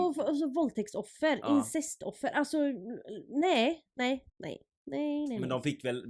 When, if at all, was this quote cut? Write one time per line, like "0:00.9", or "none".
0:04.3